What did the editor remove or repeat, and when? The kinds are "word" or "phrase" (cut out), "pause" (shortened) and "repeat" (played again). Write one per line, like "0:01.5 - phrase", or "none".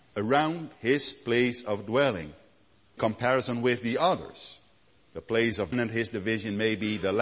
0:03.0 - word
0:05.7 - word